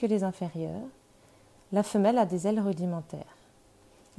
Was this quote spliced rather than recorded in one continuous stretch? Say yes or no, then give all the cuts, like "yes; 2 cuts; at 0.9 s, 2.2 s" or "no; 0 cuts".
no; 0 cuts